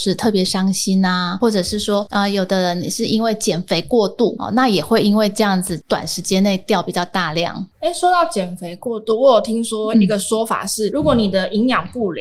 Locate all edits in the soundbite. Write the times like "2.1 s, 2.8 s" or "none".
none